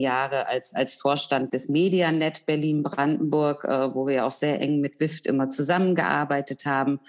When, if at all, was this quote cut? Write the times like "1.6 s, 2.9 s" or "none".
1.5 s